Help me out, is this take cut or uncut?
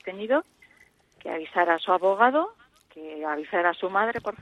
uncut